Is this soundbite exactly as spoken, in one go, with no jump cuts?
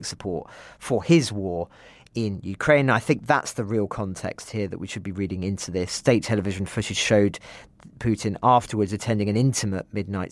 yes; 0 cuts

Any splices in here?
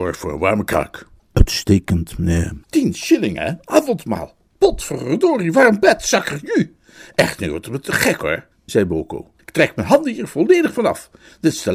yes; 4 cuts; at 1.2 s, 2.6 s, 8.5 s, 9.4 s

